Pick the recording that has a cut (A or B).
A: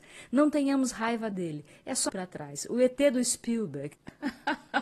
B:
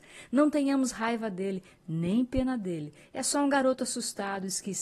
A